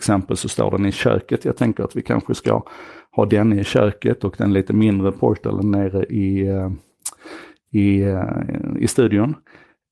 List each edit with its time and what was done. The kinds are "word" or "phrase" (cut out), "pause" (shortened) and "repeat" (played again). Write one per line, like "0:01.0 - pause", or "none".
none